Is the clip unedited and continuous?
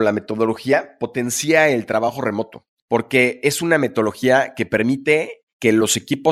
yes; 0 cuts

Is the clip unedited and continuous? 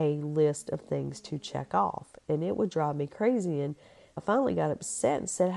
yes; 0 cuts

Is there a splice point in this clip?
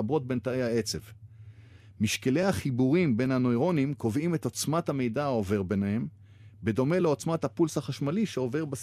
no; 0 cuts

